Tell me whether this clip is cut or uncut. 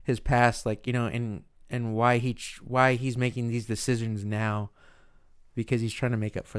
uncut